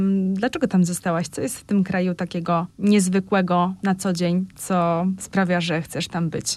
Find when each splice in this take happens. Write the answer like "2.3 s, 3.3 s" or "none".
none